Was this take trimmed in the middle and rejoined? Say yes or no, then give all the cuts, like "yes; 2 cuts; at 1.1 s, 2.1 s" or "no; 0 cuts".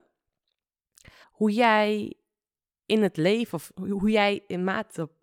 yes; 1 cut; at 1.2 s